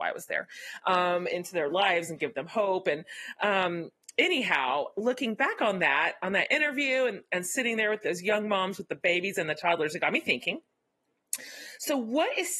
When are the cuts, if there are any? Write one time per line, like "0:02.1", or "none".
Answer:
none